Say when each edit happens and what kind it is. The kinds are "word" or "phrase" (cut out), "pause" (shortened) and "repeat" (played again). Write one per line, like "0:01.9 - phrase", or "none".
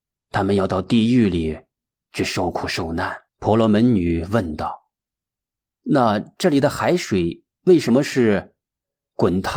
0:03.3 - pause